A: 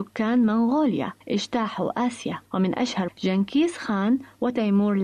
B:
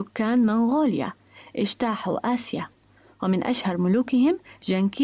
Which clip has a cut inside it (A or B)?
A